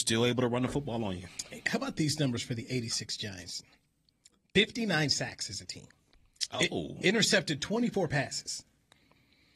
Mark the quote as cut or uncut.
uncut